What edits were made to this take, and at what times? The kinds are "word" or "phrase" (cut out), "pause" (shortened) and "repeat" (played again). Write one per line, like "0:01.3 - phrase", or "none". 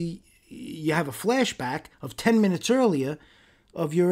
0:01.9 - pause